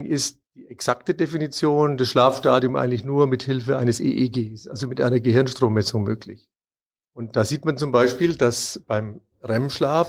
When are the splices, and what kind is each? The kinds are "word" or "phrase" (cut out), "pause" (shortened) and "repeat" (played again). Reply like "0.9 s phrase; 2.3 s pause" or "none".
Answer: none